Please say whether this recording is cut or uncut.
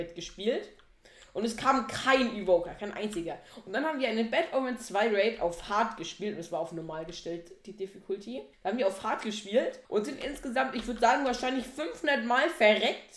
cut